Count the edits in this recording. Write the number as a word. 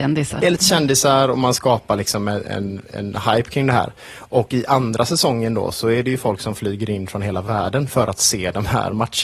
zero